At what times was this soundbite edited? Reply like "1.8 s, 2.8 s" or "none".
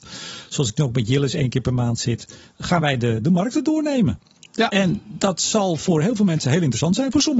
none